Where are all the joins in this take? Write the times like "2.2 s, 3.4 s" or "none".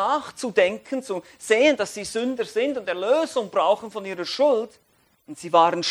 none